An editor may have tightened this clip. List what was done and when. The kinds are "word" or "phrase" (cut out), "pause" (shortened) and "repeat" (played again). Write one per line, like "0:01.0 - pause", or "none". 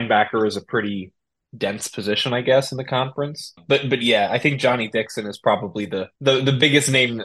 0:06.2 - pause